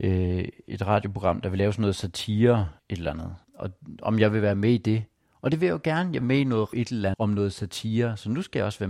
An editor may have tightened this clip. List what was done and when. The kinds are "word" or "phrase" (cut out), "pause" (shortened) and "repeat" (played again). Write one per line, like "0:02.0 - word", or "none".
0:02.8 - pause
0:03.4 - pause
0:06.2 - phrase
0:06.7 - word
0:07.1 - word